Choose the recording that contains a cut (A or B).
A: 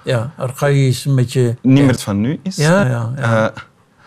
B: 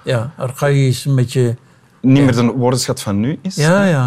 A